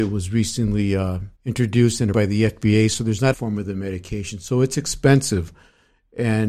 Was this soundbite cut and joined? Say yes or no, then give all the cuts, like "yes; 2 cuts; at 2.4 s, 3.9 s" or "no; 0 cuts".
yes; 3 cuts; at 1.4 s, 2.1 s, 3.3 s